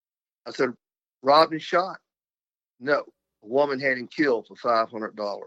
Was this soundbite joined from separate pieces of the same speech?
no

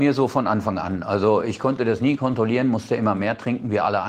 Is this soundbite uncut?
yes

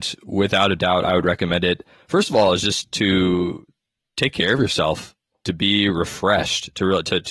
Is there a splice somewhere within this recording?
no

